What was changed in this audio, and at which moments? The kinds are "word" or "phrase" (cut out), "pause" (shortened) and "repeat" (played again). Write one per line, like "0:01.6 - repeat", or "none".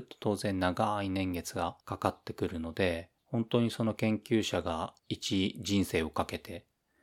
0:01.8 - pause
0:03.2 - pause
0:05.0 - pause